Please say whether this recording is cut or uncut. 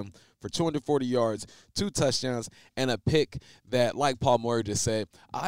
uncut